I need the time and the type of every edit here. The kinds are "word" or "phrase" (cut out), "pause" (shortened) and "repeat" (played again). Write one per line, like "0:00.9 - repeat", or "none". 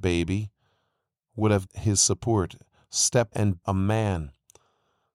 0:01.7 - word
0:03.3 - word
0:03.6 - word